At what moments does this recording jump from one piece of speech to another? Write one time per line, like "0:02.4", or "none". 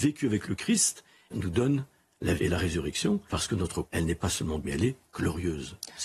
0:01.3
0:02.4
0:03.3
0:03.8
0:04.6